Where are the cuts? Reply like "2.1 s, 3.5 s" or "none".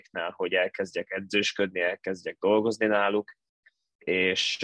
none